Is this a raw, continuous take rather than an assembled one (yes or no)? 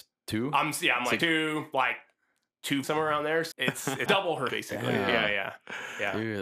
no